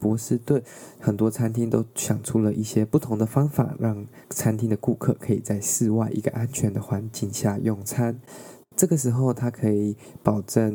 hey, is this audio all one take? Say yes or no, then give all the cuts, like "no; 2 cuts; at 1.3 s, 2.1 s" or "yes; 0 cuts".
no; 1 cut; at 4.2 s